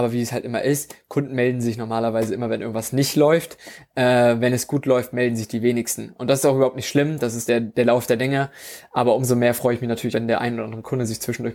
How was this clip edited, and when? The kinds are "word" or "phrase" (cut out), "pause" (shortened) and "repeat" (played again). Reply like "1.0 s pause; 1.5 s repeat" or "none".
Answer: 7.5 s word; 10.1 s word